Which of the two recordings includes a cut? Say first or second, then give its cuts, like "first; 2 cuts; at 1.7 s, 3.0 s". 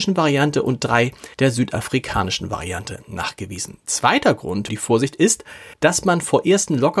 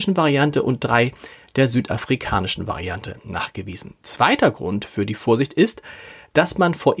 first; 3 cuts; at 1.3 s, 4.7 s, 5.7 s